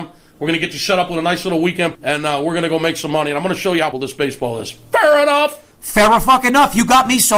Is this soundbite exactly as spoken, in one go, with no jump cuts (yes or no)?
no